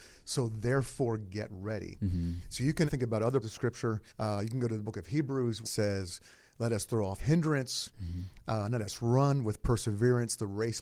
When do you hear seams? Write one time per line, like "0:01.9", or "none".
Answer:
0:02.9
0:03.4
0:04.1
0:05.6
0:07.2